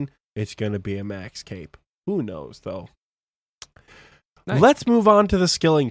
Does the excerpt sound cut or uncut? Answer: uncut